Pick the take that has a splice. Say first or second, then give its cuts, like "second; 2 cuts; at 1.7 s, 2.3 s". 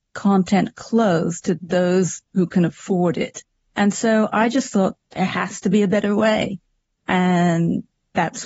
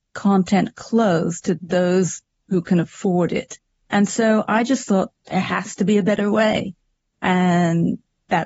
first; 1 cut; at 2.3 s